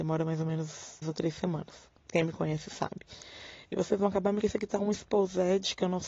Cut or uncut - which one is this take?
cut